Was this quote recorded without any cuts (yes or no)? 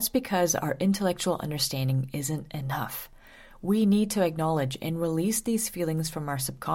yes